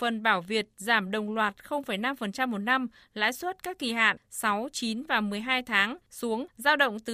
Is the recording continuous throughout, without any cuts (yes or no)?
no